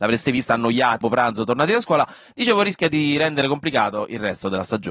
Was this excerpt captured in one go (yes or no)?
no